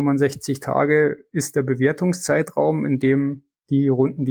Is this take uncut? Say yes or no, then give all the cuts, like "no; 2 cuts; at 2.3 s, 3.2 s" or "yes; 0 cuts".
yes; 0 cuts